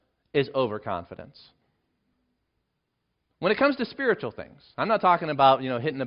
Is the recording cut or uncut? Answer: uncut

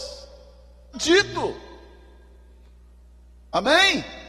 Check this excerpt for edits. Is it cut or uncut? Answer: cut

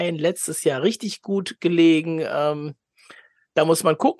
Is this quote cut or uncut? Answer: uncut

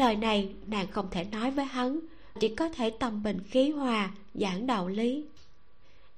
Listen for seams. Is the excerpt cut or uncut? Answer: cut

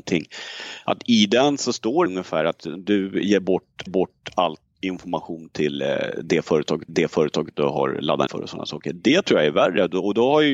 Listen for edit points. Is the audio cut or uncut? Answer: cut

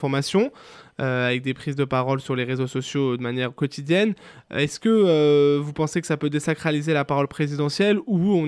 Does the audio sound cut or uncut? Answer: uncut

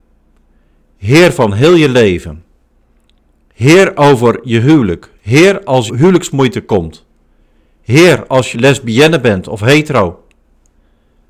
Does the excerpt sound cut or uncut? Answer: cut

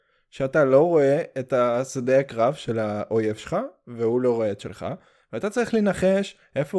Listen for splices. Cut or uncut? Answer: uncut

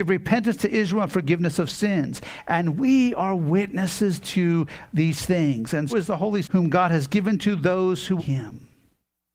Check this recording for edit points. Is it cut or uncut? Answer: cut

